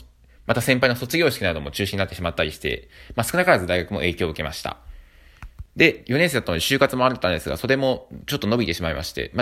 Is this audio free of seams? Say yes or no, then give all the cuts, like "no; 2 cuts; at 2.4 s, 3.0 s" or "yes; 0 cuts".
no; 1 cut; at 5.7 s